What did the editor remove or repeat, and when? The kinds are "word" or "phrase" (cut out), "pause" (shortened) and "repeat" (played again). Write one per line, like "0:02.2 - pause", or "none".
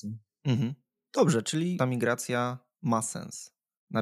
0:01.8 - phrase